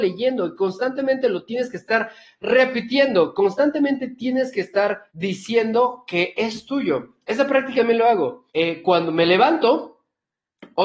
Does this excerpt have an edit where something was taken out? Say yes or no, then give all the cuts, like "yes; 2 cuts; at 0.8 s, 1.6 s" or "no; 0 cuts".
yes; 3 cuts; at 5.1 s, 7.8 s, 8.5 s